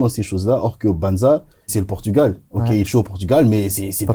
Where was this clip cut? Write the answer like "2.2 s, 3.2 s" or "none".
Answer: 1.7 s, 2.9 s